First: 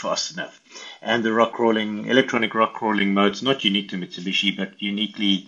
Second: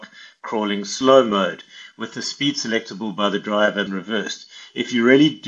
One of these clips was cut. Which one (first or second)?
second